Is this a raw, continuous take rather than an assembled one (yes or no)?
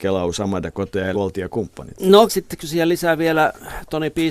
no